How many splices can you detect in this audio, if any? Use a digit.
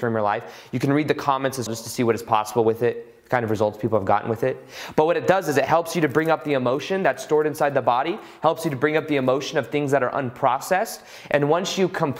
1